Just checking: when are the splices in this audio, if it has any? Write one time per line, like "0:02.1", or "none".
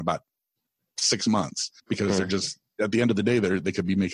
0:01.8